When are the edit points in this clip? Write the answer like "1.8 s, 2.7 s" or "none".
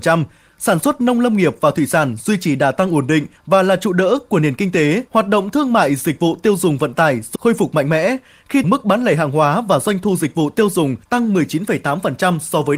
3.4 s, 5.1 s, 7.4 s, 8.6 s, 11.0 s